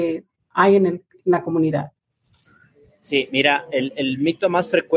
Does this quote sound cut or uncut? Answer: uncut